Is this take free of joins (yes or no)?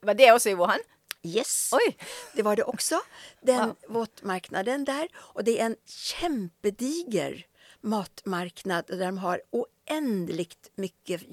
yes